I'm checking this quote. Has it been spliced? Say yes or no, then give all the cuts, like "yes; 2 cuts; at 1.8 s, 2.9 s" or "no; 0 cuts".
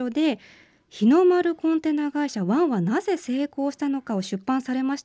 no; 0 cuts